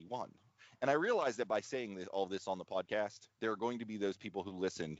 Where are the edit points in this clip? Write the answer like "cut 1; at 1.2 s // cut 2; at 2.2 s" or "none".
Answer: cut 1; at 3.3 s